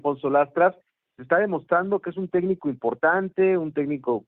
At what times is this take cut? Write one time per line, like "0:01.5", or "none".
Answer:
0:01.2